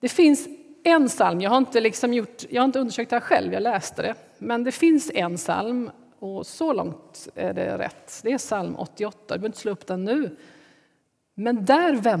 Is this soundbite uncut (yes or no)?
yes